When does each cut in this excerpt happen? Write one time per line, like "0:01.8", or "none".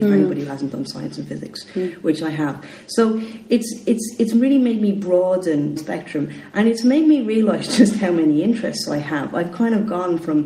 0:05.8